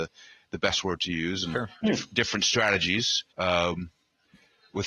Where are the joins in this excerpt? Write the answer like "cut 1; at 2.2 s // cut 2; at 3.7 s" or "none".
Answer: cut 1; at 3.3 s